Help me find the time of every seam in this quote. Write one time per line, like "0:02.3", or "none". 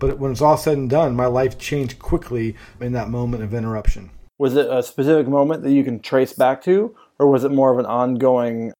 none